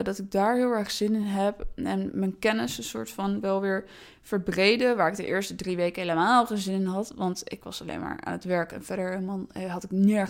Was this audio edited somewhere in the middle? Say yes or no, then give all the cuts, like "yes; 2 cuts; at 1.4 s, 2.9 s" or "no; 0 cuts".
no; 0 cuts